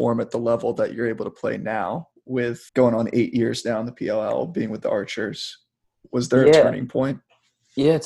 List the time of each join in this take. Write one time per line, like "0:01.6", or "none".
0:02.7